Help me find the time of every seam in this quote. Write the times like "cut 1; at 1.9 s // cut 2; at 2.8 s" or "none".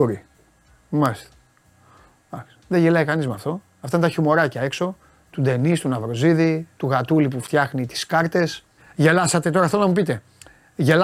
cut 1; at 5.1 s // cut 2; at 6.7 s // cut 3; at 8.8 s